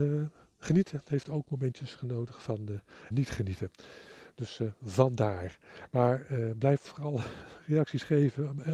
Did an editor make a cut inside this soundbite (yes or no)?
yes